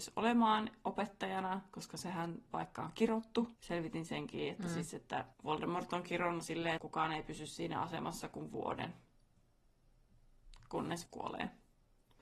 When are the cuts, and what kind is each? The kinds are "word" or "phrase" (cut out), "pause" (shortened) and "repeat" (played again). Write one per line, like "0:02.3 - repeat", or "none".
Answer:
0:03.6 - pause
0:05.3 - pause
0:06.4 - word
0:06.8 - word
0:11.1 - word